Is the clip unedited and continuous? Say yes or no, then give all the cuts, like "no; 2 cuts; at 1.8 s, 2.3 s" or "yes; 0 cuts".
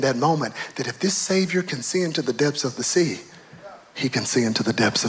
yes; 0 cuts